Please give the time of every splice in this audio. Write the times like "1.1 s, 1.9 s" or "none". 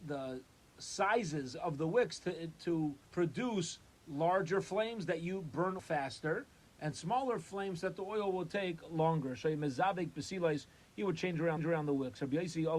3.0 s, 5.8 s, 11.6 s